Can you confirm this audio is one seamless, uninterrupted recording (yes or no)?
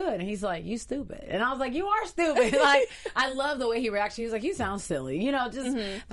yes